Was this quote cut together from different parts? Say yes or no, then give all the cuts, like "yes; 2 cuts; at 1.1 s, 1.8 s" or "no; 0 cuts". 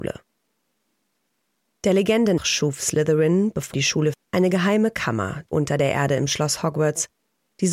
yes; 4 cuts; at 2.4 s, 3.7 s, 4.1 s, 5.5 s